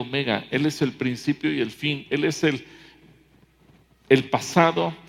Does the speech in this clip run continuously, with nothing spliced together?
yes; 0 cuts

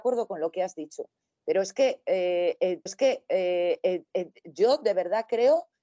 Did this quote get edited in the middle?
yes; 1 cut; at 2.9 s

